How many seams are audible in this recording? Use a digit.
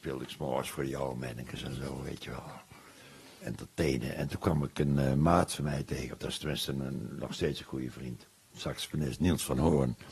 1